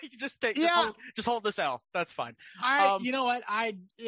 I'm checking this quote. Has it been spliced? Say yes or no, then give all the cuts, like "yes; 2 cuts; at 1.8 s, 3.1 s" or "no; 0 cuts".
no; 0 cuts